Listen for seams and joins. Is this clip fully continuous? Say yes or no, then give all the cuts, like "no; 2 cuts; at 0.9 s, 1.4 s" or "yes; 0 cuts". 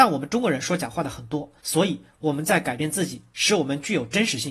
no; 1 cut; at 1.6 s